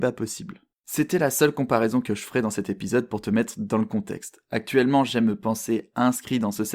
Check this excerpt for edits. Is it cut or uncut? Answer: uncut